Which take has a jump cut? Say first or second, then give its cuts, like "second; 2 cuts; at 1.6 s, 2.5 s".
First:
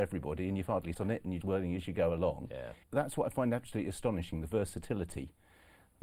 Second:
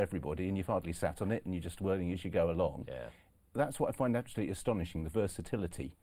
first; 3 cuts; at 0.9 s, 1.4 s, 2.8 s